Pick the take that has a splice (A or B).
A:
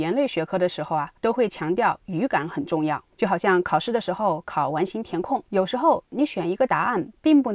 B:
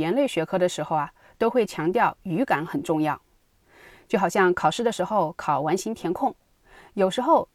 A